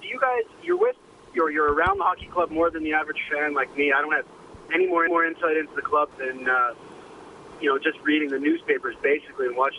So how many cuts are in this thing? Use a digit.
2